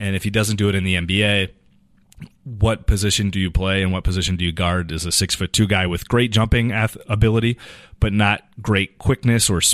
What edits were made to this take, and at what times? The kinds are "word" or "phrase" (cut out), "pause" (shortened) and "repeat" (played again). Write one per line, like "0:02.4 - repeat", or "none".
none